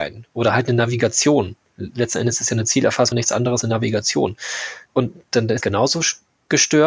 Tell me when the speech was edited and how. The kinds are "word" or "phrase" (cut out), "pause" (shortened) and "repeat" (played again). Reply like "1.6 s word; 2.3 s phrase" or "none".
3.1 s phrase; 3.6 s word; 4.8 s pause; 5.6 s word